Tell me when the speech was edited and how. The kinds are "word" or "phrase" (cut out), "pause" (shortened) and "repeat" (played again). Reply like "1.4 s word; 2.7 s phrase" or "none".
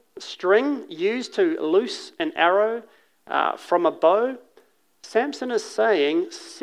none